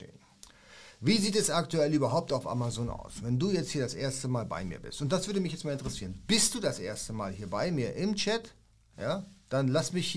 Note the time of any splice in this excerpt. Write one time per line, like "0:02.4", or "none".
none

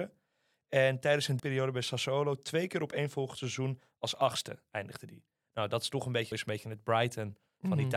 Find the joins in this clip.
0:01.4
0:06.3

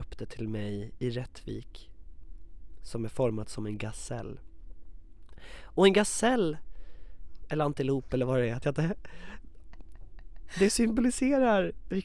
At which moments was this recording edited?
0:08.6

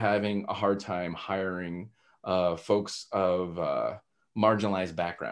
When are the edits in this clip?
none

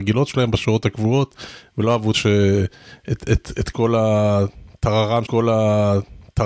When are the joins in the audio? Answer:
0:02.1
0:05.3

